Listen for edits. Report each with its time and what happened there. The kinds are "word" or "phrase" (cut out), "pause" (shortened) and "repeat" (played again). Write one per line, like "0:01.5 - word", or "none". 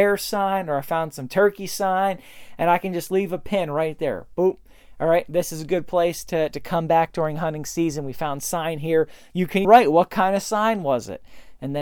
0:09.6 - word